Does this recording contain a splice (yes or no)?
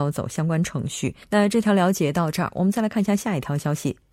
yes